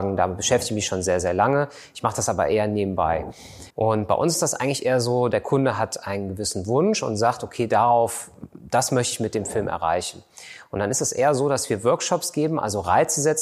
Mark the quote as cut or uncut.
cut